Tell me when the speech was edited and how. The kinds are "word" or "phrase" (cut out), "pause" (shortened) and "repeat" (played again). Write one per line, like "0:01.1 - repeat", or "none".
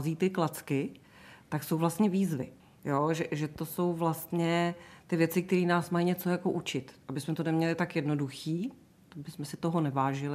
none